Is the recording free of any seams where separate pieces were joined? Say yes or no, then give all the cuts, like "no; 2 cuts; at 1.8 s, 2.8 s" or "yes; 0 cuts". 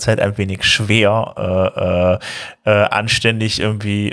yes; 0 cuts